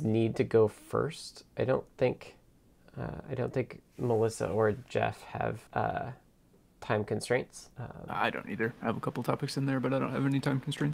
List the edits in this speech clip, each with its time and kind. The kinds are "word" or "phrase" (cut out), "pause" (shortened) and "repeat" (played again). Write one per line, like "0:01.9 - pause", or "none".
0:02.8 - pause
0:05.7 - pause
0:07.7 - pause

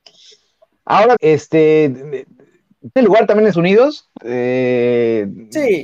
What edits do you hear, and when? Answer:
0:01.2 - word
0:03.0 - word
0:03.5 - word
0:04.2 - word

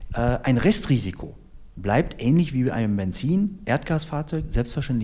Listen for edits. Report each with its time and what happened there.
none

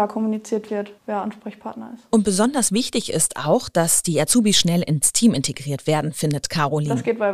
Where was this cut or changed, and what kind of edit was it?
0:01.0 - pause

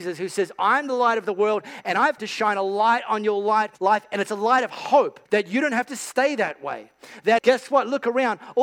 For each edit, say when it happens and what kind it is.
0:02.2 - word
0:03.7 - pause
0:05.3 - pause
0:07.4 - word

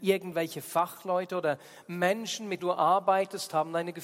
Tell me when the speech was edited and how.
0:02.6 - word

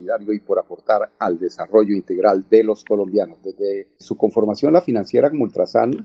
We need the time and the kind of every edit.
0:04.0 - word

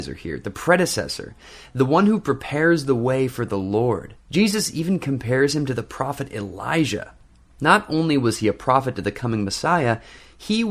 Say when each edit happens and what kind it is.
0:04.2 - pause
0:07.3 - pause

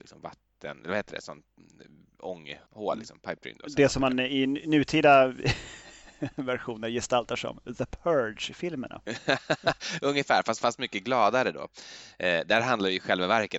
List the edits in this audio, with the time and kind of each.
0:02.7 - pause

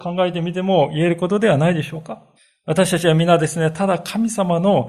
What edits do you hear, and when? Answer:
0:02.4 - pause

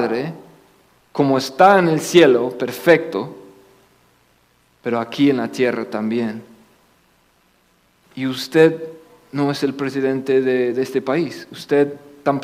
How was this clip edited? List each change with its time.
none

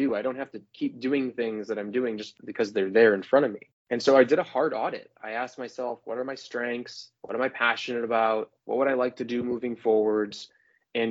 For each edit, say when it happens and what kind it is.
0:07.2 - pause
0:08.6 - pause

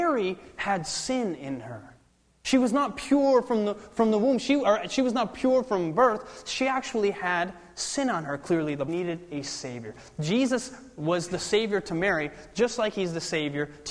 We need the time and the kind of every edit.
0:08.9 - phrase

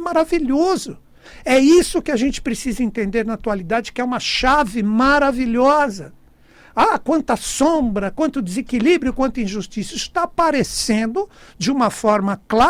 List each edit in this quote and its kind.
none

